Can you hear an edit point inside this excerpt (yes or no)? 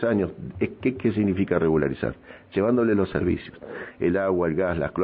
no